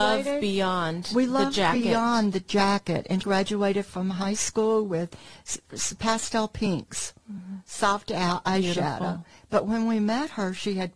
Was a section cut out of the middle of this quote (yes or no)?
yes